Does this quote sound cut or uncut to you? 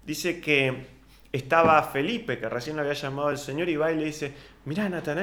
uncut